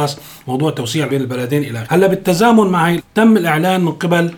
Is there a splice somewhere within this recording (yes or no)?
yes